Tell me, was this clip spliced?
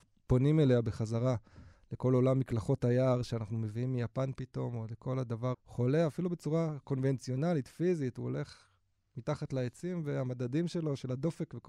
yes; 1 cut; at 5.5 s

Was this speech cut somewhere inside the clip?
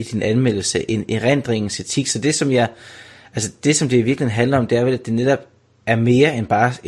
no; 0 cuts

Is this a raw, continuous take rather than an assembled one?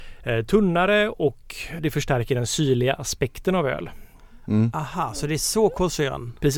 no; 1 cut; at 1.8 s

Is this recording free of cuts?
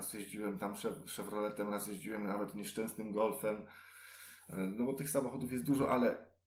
yes; 0 cuts

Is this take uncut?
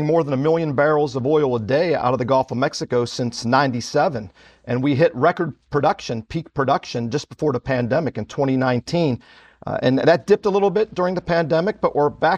yes; 0 cuts

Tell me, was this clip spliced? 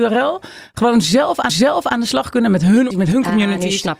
yes; 2 cuts; at 1.5 s, 2.9 s

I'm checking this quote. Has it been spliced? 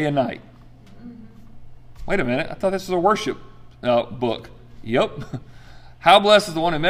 no; 0 cuts

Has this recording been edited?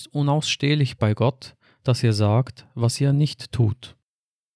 no; 0 cuts

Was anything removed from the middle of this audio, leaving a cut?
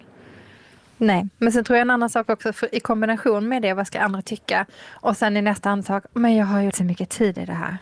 yes; 1 cut; at 6.7 s

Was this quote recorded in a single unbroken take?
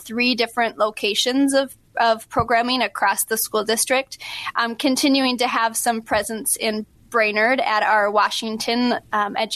yes; 0 cuts

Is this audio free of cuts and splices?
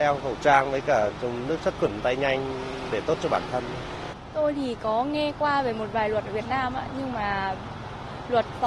yes; 0 cuts

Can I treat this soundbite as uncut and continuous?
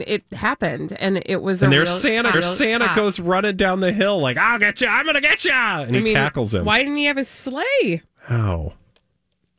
no; 2 cuts; at 2.3 s, 8.1 s

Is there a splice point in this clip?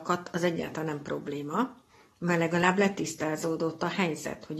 no; 0 cuts

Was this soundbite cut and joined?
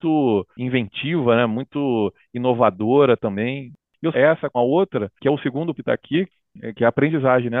yes; 4 cuts; at 3.8 s, 4.1 s, 4.5 s, 5.7 s

